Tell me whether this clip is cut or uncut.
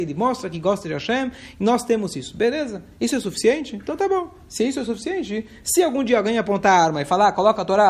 uncut